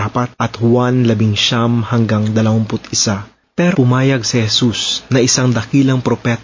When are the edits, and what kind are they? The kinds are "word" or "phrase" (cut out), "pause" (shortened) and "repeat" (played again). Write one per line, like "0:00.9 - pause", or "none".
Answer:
0:03.7 - word